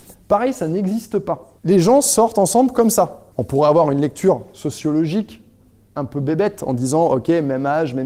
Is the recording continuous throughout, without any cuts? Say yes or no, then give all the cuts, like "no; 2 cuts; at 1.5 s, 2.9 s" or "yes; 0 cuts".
no; 2 cuts; at 1.6 s, 3.3 s